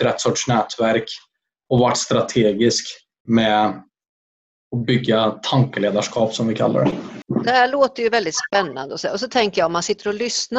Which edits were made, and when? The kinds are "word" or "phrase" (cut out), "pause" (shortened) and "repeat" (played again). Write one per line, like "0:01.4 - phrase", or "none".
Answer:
none